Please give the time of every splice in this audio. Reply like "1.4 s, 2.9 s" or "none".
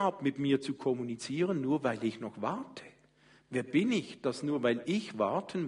none